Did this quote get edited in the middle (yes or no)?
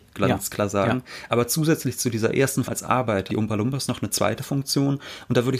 yes